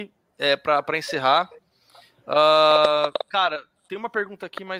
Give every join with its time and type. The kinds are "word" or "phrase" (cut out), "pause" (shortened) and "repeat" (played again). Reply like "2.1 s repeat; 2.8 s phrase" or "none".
none